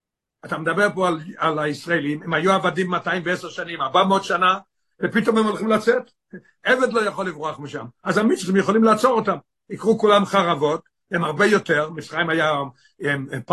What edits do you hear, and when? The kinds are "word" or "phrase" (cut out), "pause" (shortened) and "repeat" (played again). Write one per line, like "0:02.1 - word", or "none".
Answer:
none